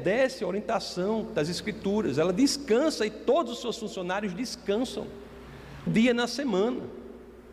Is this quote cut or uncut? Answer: cut